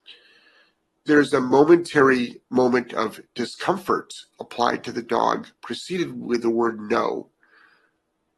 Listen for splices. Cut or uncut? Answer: cut